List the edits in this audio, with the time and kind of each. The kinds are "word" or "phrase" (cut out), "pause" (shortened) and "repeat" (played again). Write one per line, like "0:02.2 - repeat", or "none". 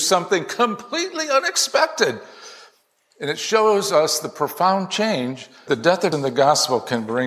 0:05.7 - word
0:06.1 - word